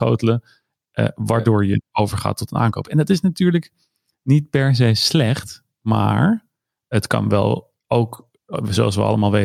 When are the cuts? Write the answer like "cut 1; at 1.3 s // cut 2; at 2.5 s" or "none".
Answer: none